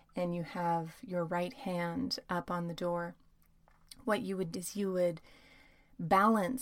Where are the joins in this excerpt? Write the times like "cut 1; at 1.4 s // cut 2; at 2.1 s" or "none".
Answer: cut 1; at 4.5 s